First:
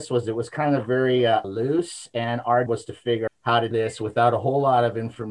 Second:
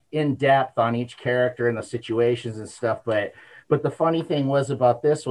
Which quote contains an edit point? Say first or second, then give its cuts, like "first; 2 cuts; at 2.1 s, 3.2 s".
first; 4 cuts; at 1.4 s, 2.7 s, 3.3 s, 3.7 s